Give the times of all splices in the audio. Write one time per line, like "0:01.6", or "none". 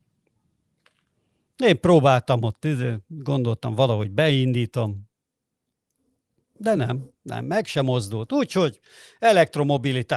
none